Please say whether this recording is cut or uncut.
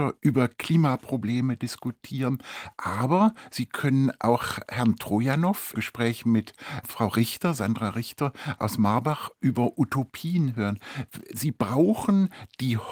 cut